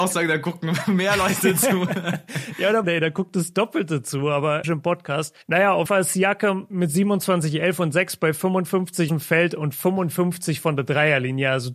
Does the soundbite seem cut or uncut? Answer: cut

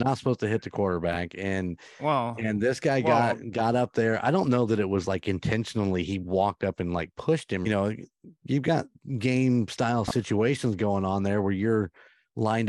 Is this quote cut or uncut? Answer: cut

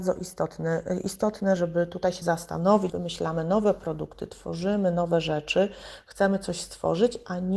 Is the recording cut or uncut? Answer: cut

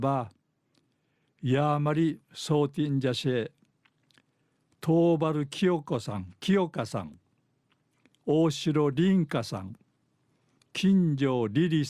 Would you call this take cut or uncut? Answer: uncut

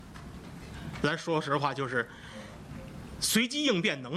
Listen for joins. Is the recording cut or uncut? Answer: uncut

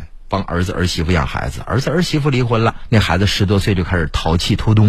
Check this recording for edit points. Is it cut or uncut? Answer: cut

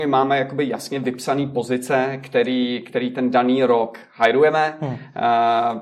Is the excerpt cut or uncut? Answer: uncut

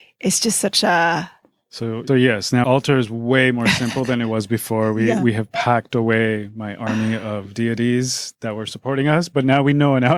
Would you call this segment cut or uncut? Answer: cut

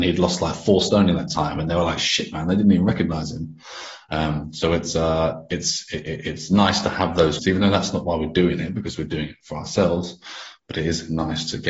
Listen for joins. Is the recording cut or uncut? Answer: cut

